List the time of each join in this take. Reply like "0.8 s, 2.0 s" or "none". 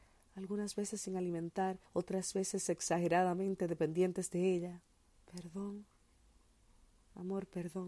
1.9 s, 4.9 s